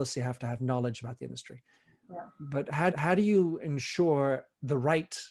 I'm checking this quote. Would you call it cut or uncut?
cut